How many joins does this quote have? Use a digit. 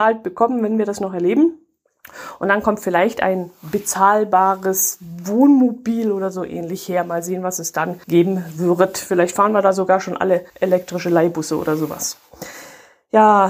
2